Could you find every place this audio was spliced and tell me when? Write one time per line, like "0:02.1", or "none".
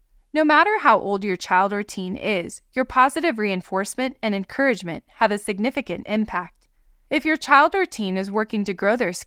none